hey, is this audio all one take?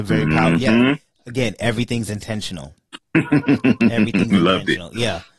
yes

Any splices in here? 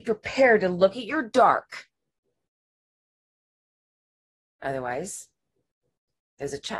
no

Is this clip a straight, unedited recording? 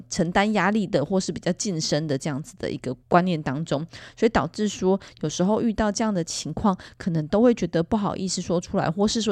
no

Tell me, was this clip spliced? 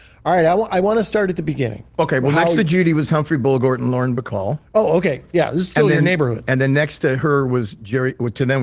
no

